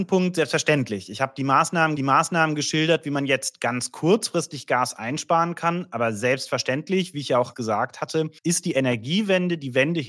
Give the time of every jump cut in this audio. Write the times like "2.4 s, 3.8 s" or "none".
2.0 s, 7.5 s, 8.4 s